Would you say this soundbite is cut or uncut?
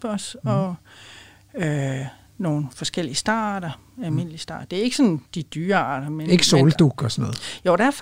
uncut